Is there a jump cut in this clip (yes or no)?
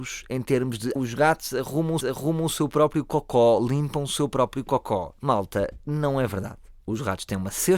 yes